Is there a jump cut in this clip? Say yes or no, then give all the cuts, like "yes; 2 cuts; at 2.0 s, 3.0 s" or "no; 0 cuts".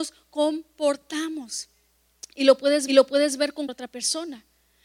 yes; 2 cuts; at 2.9 s, 3.7 s